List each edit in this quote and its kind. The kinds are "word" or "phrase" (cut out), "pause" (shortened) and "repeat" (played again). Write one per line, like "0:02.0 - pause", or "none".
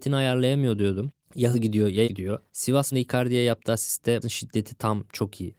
0:01.5 - word
0:02.0 - word
0:02.9 - word
0:04.2 - word